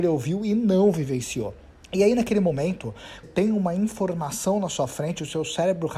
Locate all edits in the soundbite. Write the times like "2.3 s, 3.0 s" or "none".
1.7 s, 3.2 s